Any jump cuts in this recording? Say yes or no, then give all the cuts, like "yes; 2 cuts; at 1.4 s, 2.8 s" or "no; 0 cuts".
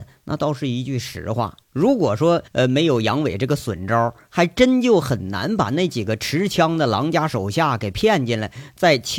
yes; 2 cuts; at 1.6 s, 2.5 s